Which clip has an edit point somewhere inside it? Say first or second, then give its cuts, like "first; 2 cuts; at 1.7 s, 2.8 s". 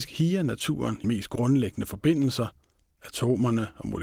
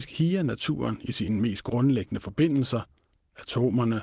first; 1 cut; at 1.0 s